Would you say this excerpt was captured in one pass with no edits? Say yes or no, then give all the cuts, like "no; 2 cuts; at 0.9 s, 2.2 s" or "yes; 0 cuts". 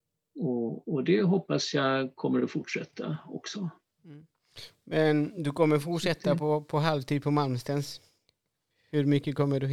yes; 0 cuts